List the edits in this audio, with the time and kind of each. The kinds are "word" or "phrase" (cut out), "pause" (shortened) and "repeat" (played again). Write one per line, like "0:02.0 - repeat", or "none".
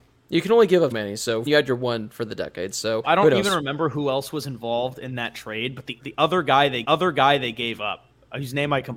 0:00.9 - word
0:01.5 - word
0:03.0 - word
0:06.0 - word
0:06.8 - repeat